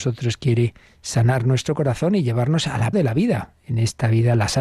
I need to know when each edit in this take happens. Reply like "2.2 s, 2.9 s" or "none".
2.9 s